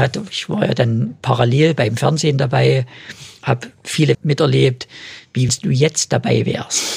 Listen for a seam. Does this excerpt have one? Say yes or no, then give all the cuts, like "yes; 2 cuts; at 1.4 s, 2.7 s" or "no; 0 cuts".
yes; 2 cuts; at 4.1 s, 5.5 s